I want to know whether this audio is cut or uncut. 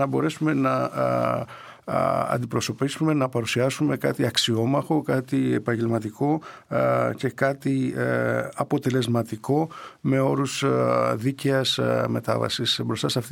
uncut